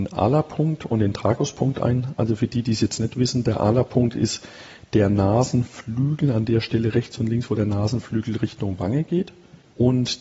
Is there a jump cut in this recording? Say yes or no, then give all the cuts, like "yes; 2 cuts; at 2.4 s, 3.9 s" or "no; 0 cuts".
no; 0 cuts